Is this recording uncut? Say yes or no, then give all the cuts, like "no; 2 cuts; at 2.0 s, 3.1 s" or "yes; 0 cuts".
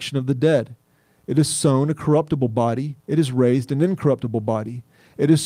no; 1 cut; at 3.0 s